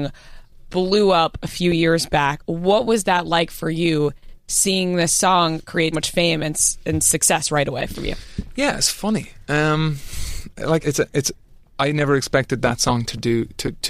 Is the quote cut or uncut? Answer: cut